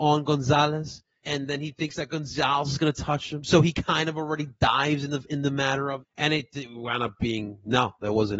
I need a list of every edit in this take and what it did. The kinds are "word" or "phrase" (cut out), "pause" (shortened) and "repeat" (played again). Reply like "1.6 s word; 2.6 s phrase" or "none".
1.2 s word; 6.0 s word